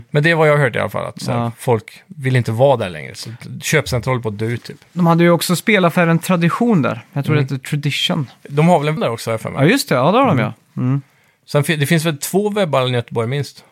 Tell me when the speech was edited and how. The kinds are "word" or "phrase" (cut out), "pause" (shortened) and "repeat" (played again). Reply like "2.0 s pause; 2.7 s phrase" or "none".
9.0 s word